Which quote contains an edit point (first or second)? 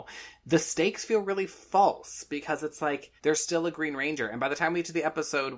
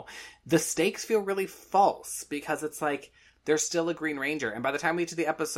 first